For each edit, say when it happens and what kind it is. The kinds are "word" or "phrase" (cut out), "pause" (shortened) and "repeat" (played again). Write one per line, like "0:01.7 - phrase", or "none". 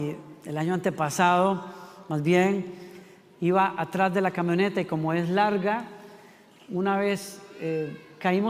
none